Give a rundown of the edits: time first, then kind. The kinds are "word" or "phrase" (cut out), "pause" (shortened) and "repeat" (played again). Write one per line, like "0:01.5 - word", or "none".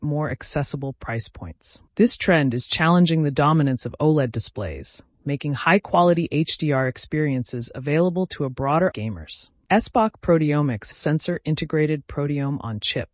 0:01.9 - pause
0:08.9 - phrase
0:10.9 - phrase